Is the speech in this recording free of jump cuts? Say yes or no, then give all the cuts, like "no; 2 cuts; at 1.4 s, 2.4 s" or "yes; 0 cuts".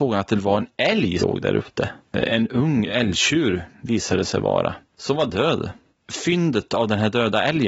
no; 3 cuts; at 1.2 s, 2.0 s, 5.9 s